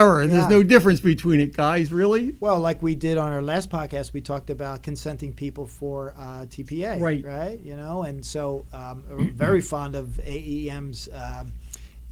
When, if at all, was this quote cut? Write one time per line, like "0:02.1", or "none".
none